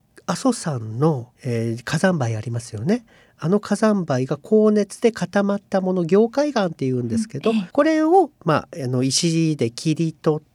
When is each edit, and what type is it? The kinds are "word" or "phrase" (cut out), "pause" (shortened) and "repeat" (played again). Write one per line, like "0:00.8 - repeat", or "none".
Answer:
0:01.3 - pause
0:07.7 - pause